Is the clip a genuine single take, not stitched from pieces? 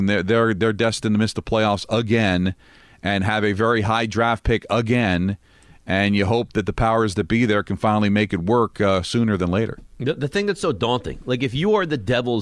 yes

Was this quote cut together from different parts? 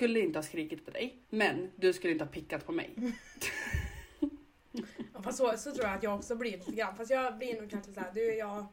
yes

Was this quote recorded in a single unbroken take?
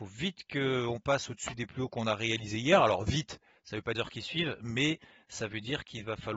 no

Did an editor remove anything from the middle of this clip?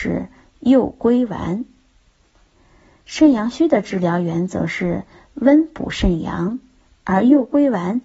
no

